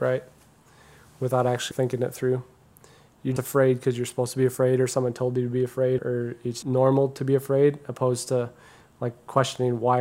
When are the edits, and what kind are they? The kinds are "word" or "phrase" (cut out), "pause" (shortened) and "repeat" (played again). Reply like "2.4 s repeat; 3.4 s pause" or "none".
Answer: 1.7 s word; 3.4 s word; 6.0 s word; 6.6 s word

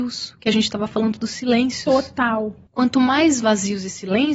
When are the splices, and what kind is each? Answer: none

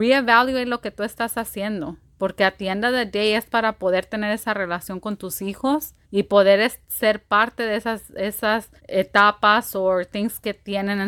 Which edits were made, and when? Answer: 6.0 s pause; 8.8 s pause

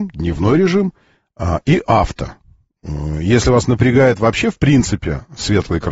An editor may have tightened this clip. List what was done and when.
none

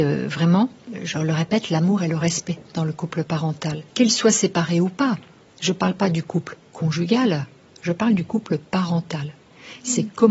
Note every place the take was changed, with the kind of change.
3.9 s pause

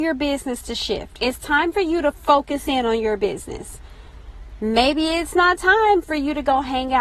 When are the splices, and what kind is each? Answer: none

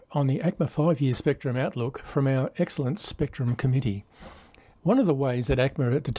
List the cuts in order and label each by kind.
none

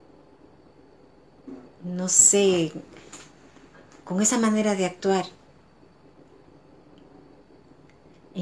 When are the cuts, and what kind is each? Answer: none

